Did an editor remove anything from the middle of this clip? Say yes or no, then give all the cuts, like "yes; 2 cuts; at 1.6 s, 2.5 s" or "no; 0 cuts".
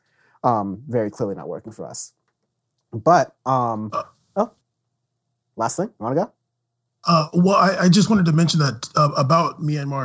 no; 0 cuts